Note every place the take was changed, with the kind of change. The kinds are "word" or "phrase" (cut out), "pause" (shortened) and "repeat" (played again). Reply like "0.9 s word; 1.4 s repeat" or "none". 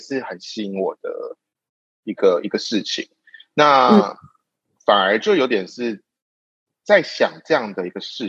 none